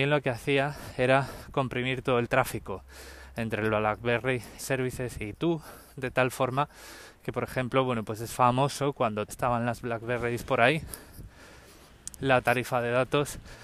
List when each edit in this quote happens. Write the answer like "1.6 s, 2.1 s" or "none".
4.6 s, 9.3 s, 12.2 s